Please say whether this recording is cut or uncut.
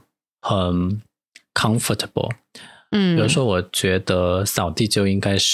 uncut